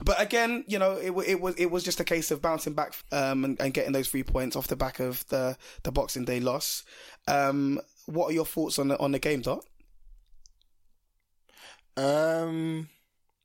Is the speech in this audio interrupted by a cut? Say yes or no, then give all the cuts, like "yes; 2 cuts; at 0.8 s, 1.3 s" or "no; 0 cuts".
yes; 1 cut; at 3.0 s